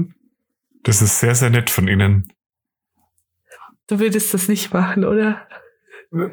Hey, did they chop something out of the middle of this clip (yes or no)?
no